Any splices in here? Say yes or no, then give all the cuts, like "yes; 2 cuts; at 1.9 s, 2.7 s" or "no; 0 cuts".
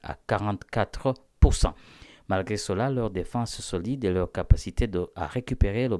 no; 0 cuts